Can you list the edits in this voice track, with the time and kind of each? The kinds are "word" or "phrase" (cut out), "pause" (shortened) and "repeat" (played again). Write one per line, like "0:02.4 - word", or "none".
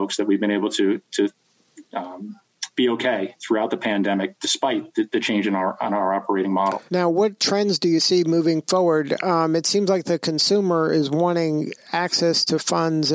0:06.9 - pause